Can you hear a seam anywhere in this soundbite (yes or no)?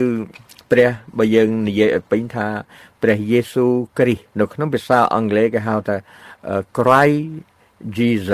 yes